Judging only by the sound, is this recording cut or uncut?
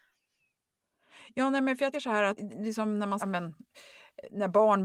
cut